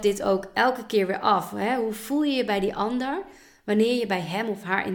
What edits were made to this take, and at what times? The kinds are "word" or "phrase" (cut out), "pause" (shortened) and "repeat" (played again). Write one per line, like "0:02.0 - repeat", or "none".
none

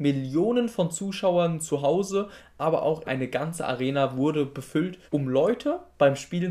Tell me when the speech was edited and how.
0:03.0 - word
0:05.1 - pause

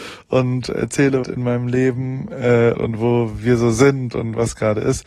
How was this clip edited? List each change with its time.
0:01.2 - phrase
0:02.7 - word
0:04.1 - word

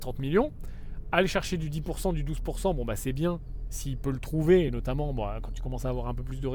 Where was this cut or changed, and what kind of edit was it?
none

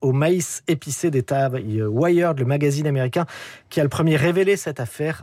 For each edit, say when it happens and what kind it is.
none

